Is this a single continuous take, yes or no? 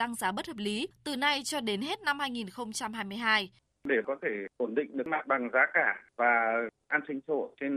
yes